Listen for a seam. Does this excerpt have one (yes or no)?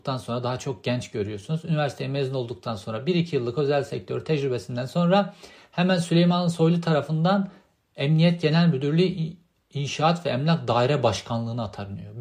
no